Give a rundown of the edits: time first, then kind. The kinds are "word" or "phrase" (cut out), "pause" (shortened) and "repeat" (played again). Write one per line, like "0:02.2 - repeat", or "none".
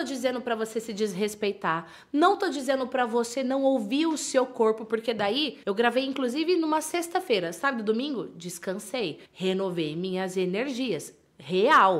0:05.6 - pause
0:09.2 - pause